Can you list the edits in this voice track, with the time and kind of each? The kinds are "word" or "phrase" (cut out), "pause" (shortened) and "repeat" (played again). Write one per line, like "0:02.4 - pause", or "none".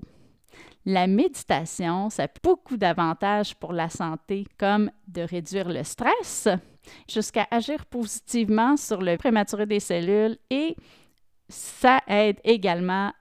0:02.4 - word
0:04.5 - pause
0:07.1 - phrase
0:09.2 - word